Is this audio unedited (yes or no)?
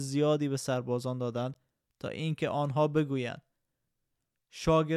yes